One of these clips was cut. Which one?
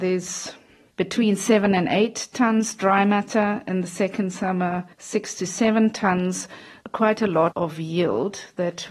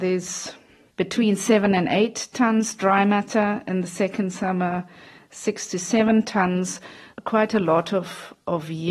first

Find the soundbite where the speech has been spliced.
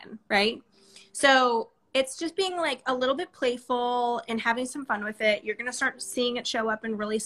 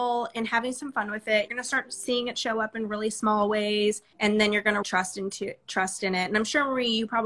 second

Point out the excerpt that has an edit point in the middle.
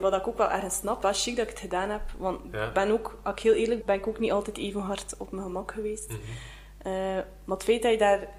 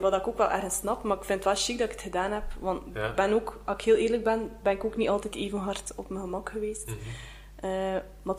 first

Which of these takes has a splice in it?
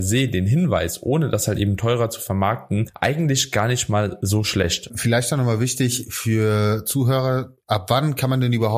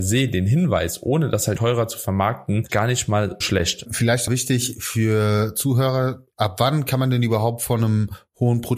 second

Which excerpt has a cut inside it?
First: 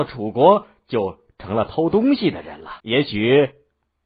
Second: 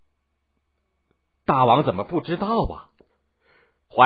first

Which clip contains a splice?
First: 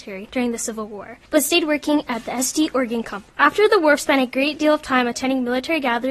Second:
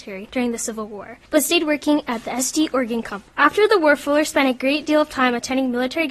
first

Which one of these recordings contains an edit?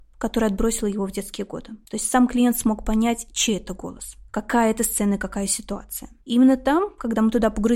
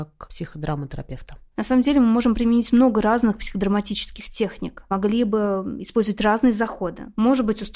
first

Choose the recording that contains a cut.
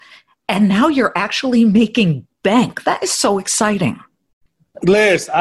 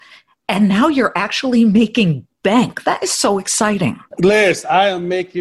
second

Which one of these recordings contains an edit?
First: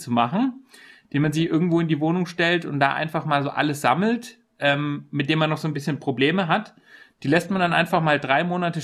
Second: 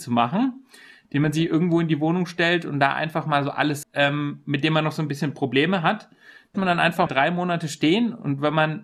second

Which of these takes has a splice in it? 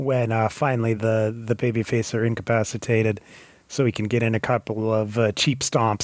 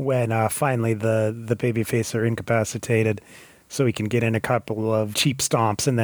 second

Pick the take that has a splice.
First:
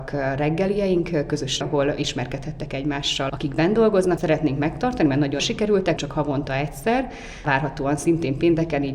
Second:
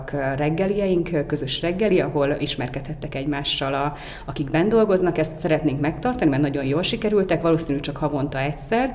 first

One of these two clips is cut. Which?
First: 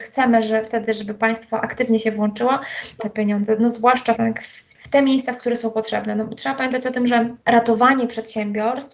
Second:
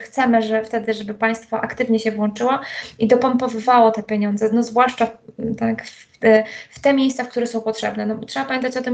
first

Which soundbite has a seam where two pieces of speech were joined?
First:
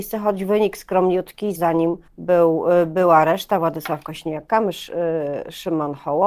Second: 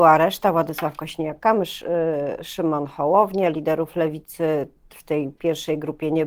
first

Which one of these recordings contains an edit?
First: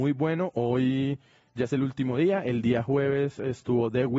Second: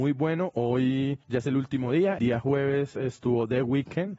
second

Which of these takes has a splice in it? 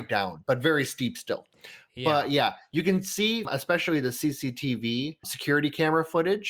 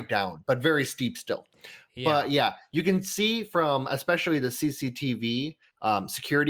first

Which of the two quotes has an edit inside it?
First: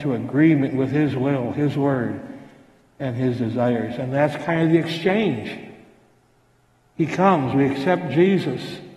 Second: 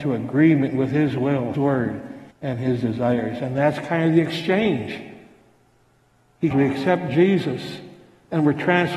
second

